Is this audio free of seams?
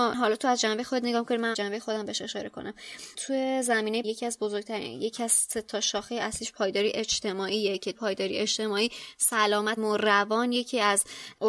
no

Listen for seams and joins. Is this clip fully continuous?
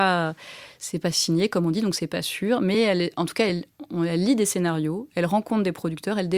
yes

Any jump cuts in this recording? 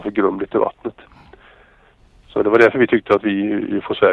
no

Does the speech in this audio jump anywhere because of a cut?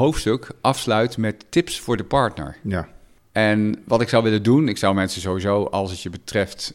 no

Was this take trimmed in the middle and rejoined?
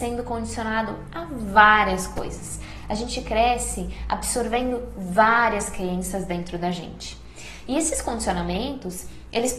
no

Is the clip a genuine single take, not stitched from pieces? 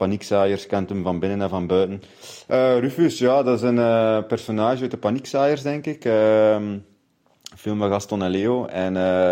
yes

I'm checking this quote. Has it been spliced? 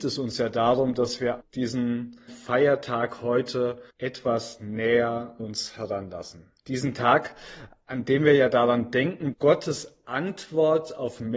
yes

